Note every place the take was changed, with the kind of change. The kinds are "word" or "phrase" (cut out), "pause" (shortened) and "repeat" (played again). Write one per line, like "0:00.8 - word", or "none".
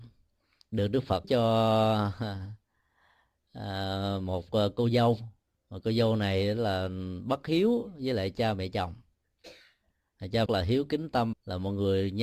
0:01.2 - word
0:05.5 - pause
0:10.5 - phrase
0:11.3 - word